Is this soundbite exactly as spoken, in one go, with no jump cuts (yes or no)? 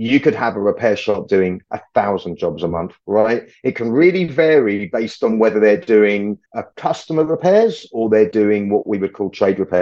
no